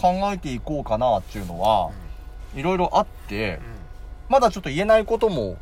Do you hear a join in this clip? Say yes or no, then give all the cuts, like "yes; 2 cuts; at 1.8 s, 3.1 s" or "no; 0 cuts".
yes; 1 cut; at 4.3 s